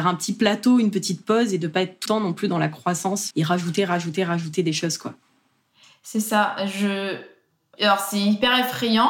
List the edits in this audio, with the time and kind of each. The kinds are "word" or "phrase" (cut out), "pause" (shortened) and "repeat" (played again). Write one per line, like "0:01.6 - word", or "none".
0:02.1 - word
0:03.3 - word